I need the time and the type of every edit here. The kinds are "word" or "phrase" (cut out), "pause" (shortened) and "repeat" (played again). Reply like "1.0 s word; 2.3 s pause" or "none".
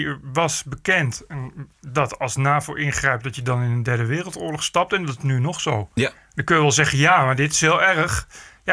none